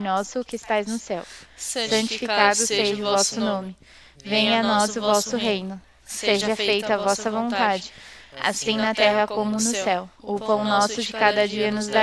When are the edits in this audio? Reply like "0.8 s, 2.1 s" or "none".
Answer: 10.1 s